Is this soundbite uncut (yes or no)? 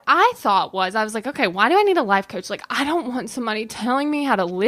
yes